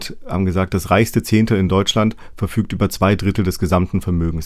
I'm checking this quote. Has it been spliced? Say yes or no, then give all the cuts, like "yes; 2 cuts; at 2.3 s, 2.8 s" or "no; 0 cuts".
no; 0 cuts